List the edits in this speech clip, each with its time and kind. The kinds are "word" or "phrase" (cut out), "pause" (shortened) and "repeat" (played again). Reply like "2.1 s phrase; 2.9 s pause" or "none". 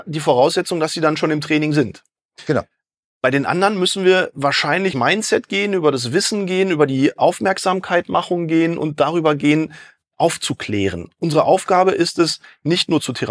4.9 s word